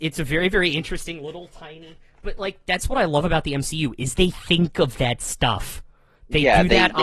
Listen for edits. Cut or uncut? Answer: uncut